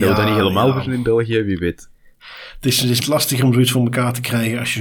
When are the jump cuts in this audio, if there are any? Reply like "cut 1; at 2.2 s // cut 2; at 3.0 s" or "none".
cut 1; at 3.0 s